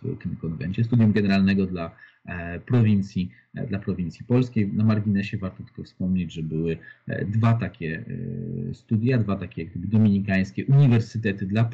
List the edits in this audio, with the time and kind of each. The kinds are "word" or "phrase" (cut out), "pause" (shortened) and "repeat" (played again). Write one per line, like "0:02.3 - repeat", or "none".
none